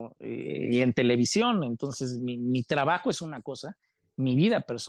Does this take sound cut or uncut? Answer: uncut